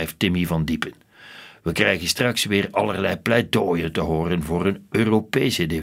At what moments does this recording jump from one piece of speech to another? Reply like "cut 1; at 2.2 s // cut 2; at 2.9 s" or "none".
none